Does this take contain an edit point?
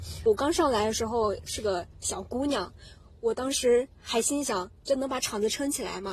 no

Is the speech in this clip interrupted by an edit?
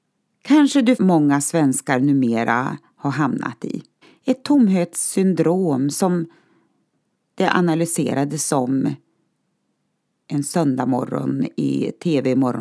yes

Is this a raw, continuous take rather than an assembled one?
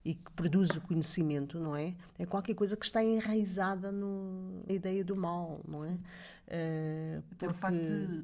no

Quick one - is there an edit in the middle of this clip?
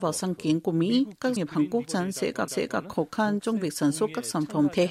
yes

